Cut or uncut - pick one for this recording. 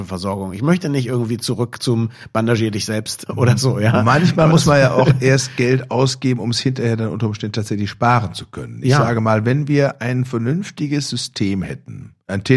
uncut